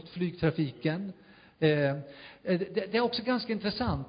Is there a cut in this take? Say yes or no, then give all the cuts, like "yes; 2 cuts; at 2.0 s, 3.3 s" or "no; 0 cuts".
no; 0 cuts